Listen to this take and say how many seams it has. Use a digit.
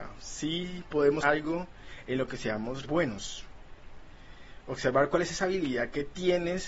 2